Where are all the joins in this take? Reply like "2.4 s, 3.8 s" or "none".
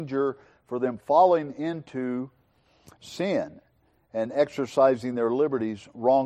none